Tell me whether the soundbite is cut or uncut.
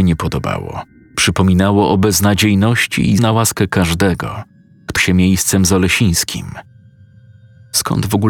cut